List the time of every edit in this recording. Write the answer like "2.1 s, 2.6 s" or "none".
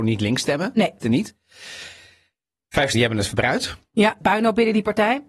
1.0 s, 2.9 s, 4.2 s